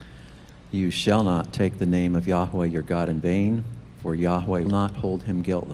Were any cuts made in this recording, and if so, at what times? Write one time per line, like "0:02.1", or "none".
0:04.7